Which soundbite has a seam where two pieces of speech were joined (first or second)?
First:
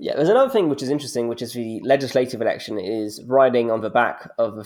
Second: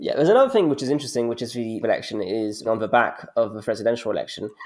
second